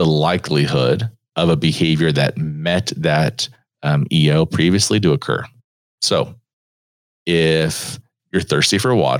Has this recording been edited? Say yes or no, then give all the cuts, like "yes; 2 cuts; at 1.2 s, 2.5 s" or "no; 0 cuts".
no; 0 cuts